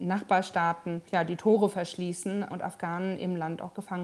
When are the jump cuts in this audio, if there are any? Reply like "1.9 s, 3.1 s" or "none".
1.1 s, 2.5 s